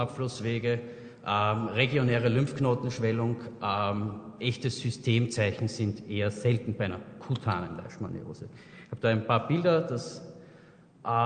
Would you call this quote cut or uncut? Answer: uncut